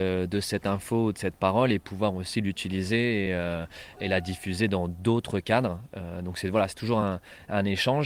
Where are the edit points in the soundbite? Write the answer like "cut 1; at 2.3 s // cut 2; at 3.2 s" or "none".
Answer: none